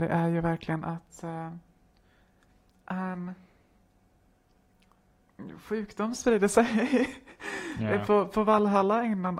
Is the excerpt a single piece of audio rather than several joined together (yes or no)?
yes